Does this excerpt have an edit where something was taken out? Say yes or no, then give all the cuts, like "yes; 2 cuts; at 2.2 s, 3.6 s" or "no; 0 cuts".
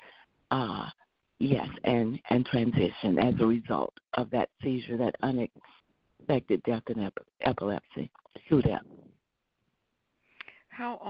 no; 0 cuts